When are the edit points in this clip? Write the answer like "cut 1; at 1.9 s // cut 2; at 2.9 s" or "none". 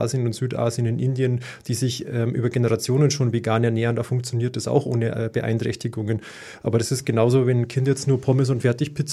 none

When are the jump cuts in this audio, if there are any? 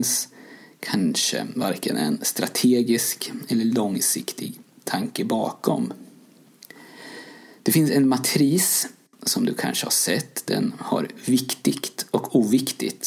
none

